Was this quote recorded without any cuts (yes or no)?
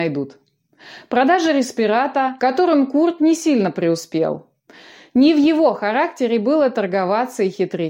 no